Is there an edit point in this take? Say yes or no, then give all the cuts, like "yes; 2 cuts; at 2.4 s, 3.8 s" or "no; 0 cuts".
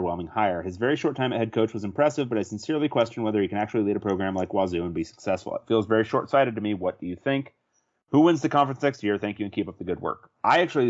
no; 0 cuts